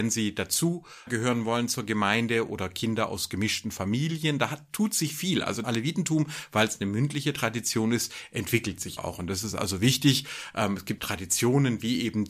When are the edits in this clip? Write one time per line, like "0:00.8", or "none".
0:01.1
0:05.6
0:09.0
0:11.0

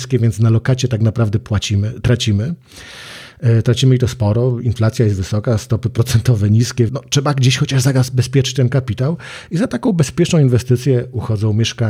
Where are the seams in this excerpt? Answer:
0:06.9

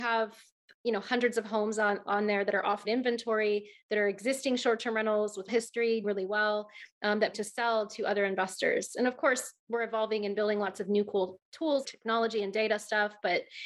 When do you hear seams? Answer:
0:02.8
0:05.5
0:06.0
0:07.3
0:11.8

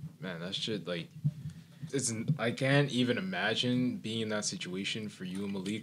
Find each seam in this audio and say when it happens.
0:01.9

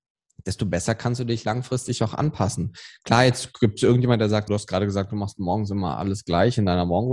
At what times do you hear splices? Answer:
0:04.5

